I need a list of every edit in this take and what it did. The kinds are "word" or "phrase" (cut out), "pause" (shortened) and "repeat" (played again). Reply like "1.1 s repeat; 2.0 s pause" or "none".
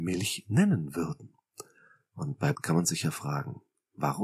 2.5 s word